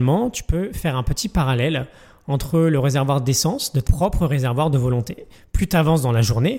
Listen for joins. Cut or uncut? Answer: cut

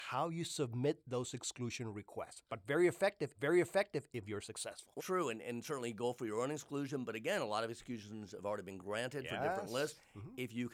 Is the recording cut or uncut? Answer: cut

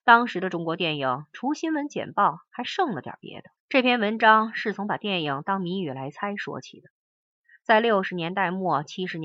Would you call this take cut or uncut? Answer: cut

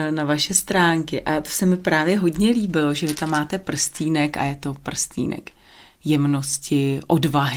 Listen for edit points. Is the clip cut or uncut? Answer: uncut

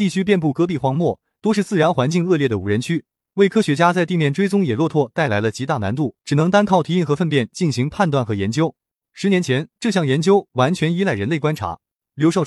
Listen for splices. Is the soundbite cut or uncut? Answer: cut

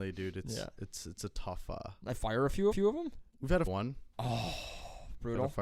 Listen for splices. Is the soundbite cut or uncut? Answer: cut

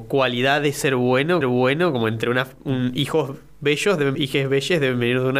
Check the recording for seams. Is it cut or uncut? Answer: cut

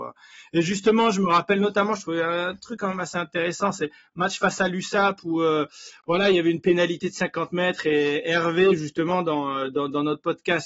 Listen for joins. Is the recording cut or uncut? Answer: uncut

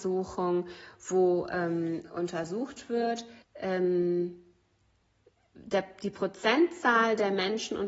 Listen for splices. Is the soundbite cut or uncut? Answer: cut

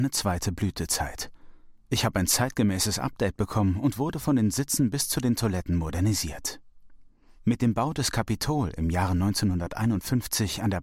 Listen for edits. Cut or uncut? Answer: uncut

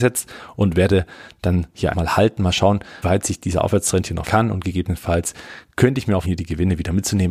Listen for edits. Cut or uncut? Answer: cut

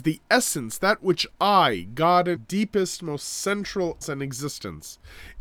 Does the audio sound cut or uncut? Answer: cut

